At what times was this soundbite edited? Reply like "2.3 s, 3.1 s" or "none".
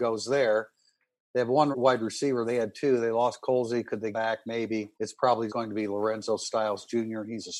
1.7 s, 4.1 s, 4.9 s, 5.5 s